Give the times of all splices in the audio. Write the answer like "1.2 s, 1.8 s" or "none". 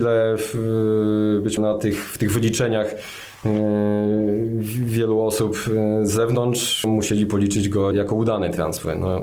1.6 s, 6.8 s, 7.9 s